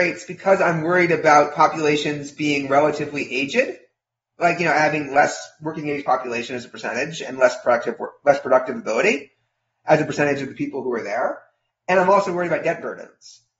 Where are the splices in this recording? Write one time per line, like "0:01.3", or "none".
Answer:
none